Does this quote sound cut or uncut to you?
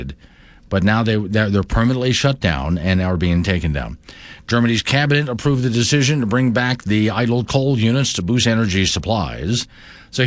uncut